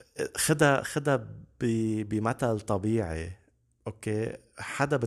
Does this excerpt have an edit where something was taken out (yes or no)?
no